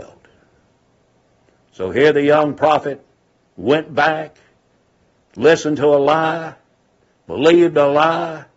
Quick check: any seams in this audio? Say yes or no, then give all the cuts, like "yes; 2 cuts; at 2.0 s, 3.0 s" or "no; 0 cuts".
no; 0 cuts